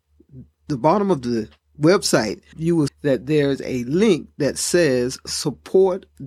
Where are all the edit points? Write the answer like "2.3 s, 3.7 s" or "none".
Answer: 2.5 s, 2.9 s